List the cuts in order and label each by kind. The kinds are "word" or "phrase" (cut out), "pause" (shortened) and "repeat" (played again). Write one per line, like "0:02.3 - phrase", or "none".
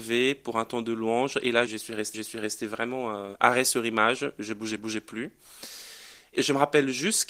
0:02.1 - repeat
0:04.8 - repeat

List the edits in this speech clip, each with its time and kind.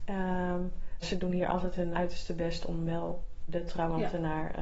0:01.0 - word
0:01.9 - word
0:03.5 - word

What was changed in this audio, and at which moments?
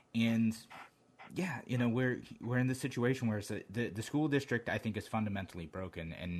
none

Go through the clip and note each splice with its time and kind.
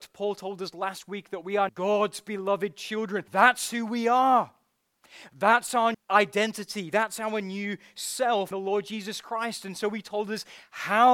0:01.7 - word
0:03.3 - pause
0:05.9 - word
0:08.5 - phrase

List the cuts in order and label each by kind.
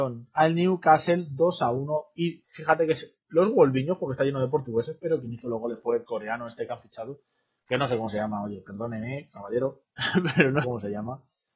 0:09.9 - pause
0:10.6 - word

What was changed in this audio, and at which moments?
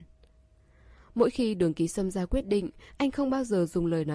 none

